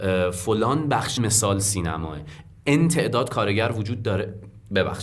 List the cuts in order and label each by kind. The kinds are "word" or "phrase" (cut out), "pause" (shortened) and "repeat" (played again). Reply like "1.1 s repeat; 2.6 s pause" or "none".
1.2 s phrase